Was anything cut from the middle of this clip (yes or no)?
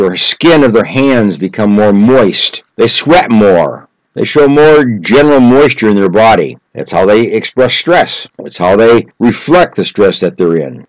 no